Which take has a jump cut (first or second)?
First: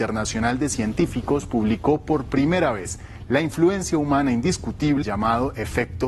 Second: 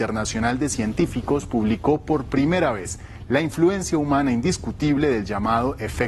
first